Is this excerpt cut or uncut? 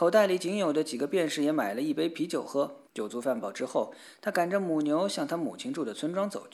cut